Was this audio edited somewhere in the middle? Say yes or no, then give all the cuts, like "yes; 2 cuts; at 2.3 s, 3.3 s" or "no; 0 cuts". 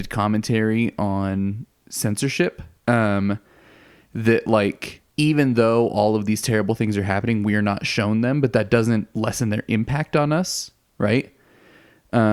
yes; 3 cuts; at 2.8 s, 5.1 s, 9.1 s